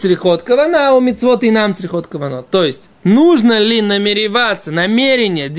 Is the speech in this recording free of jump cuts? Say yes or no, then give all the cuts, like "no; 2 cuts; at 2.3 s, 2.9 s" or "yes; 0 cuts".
yes; 0 cuts